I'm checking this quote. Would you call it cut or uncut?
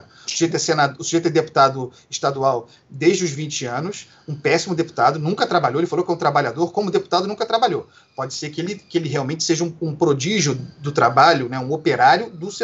uncut